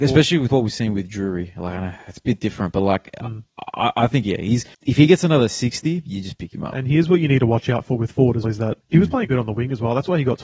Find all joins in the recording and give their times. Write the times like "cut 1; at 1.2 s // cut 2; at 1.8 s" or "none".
cut 1; at 4.7 s // cut 2; at 8.4 s // cut 3; at 8.8 s // cut 4; at 9.2 s